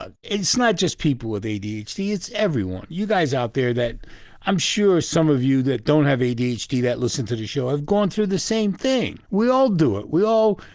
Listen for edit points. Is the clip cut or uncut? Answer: cut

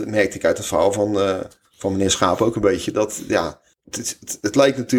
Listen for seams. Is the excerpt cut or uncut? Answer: uncut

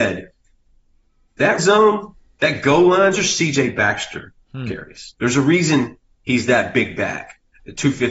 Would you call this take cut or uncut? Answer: cut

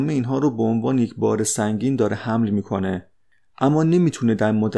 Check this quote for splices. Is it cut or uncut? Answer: uncut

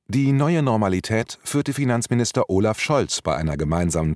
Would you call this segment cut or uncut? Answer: uncut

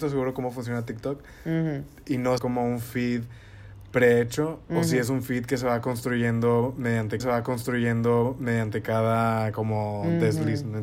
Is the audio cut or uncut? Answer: cut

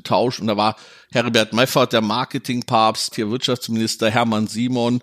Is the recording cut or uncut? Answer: cut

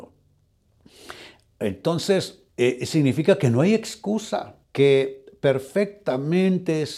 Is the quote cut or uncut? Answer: cut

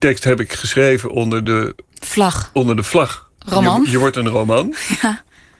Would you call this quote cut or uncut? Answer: uncut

